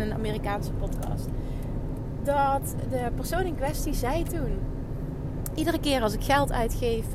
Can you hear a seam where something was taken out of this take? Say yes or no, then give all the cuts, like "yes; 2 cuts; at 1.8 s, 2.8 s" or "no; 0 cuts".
no; 0 cuts